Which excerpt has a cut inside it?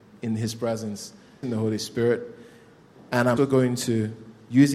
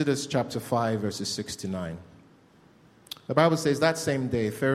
first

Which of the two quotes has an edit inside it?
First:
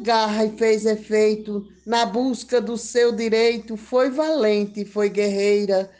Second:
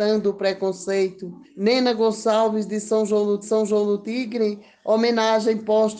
second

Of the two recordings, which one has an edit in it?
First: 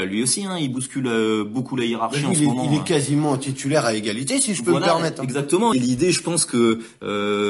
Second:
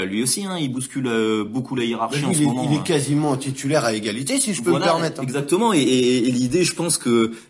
first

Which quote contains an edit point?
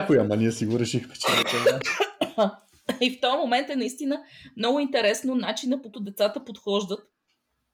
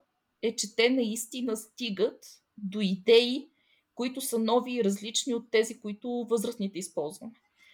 first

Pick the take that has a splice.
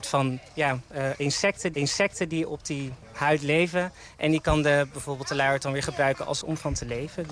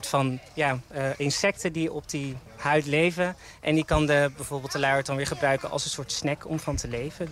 first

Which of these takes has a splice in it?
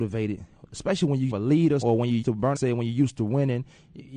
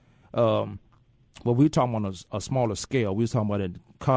first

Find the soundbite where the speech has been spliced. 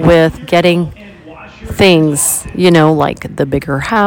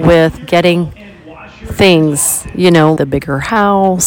second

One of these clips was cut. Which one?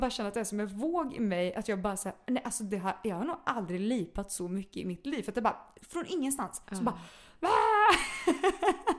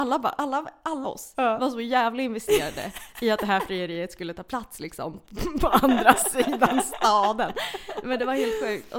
second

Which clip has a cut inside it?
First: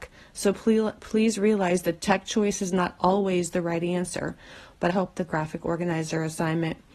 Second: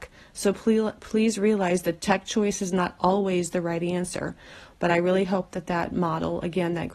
first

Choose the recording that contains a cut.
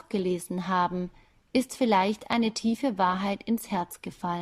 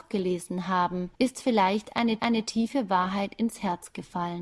second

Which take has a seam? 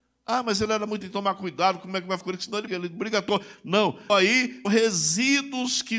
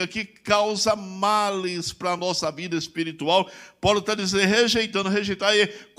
first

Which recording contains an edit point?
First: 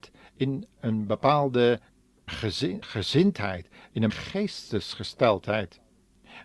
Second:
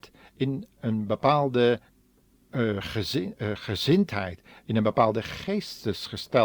first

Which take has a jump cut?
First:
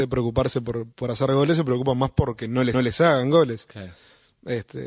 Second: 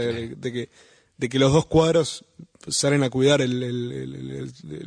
first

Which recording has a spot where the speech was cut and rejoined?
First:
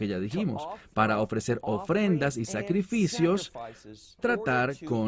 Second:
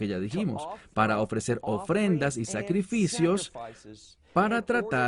first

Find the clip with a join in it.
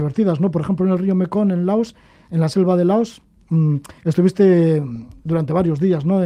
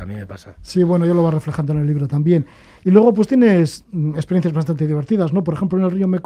first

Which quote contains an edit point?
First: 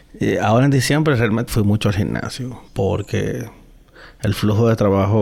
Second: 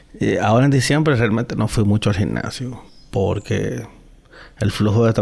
first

